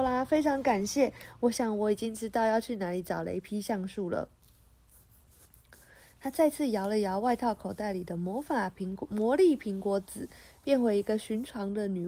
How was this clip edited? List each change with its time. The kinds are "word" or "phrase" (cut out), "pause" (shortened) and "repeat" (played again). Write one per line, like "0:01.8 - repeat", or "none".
none